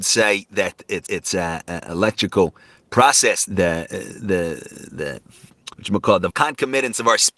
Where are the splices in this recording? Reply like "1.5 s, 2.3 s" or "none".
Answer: 1.1 s, 3.5 s, 5.7 s, 6.3 s